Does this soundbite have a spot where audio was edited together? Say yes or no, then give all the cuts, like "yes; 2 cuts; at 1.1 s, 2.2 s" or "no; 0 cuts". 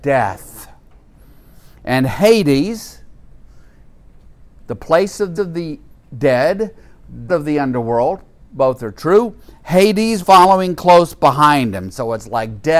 yes; 3 cuts; at 5.4 s, 7.3 s, 10.2 s